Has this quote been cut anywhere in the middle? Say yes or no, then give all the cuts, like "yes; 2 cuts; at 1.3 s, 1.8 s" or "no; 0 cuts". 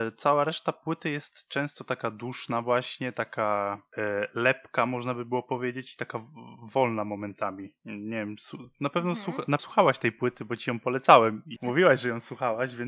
yes; 2 cuts; at 9.6 s, 11.6 s